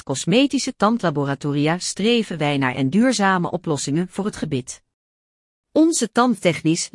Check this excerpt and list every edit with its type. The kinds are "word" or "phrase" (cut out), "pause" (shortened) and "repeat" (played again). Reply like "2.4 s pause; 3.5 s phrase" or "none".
2.7 s word